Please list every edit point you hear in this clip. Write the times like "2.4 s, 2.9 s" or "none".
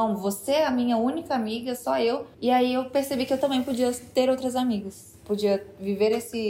2.3 s